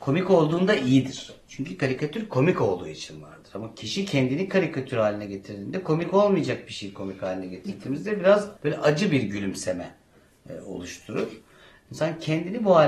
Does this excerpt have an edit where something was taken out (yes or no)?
yes